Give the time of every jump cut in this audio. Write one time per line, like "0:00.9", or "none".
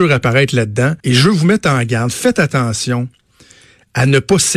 0:01.0